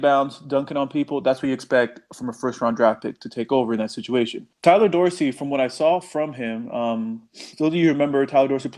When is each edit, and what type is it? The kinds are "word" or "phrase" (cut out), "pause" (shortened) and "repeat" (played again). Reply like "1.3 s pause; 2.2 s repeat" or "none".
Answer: 4.5 s pause; 7.5 s pause